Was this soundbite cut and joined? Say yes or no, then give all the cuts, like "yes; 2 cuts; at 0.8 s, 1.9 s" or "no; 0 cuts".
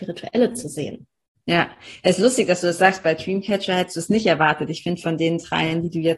no; 0 cuts